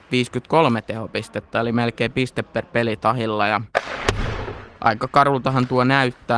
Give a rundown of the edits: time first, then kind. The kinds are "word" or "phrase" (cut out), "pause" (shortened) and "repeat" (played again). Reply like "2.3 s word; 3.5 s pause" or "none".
4.7 s pause